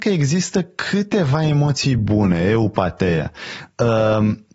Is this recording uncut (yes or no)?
yes